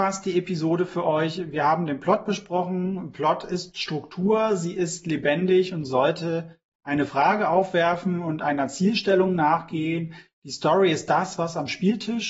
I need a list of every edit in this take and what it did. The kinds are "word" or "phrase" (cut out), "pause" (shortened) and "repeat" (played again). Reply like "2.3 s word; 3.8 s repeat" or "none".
none